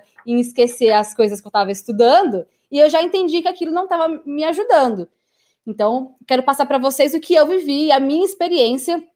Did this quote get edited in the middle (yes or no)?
no